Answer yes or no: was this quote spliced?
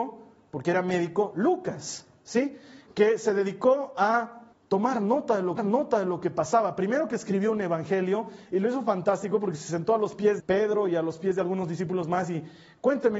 yes